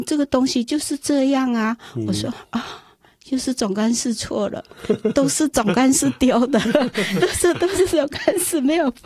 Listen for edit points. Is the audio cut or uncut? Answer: uncut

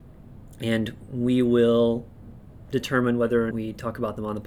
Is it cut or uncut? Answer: cut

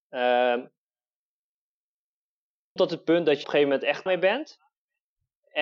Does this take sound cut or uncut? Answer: cut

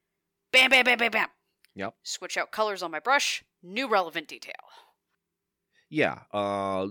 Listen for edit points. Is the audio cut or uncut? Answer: uncut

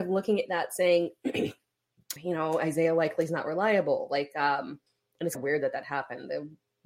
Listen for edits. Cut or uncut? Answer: cut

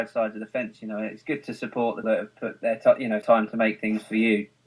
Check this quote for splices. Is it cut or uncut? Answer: cut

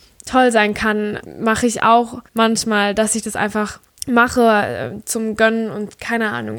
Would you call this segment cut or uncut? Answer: cut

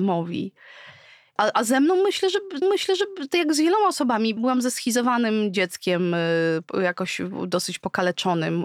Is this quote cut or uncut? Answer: cut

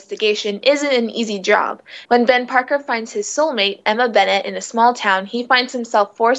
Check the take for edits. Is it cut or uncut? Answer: cut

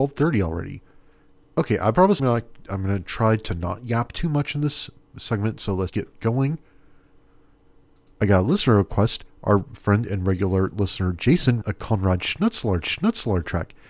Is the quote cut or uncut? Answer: cut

